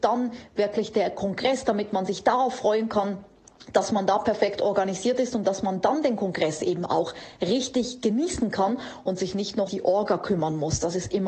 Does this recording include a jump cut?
yes; 1 cut; at 9.7 s

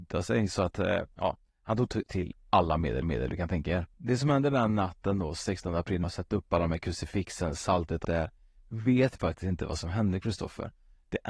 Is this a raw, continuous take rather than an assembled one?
no; 6 cuts; at 1.1 s, 3.0 s, 3.9 s, 6.0 s, 8.0 s, 9.2 s

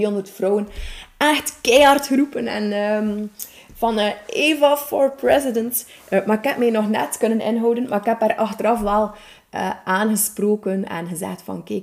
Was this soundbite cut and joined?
no; 0 cuts

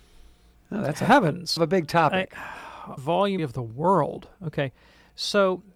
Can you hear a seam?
yes; 3 cuts; at 1.6 s, 3.0 s, 3.4 s

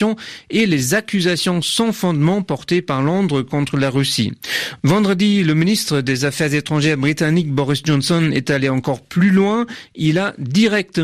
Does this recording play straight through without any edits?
yes; 0 cuts

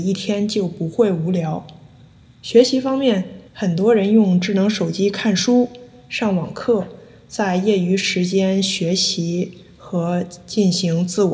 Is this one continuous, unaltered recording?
no; 1 cut; at 3.5 s

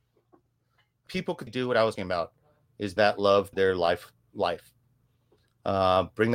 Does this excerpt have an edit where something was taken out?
yes; 5 cuts; at 1.1 s, 1.5 s, 2.0 s, 3.0 s, 3.5 s

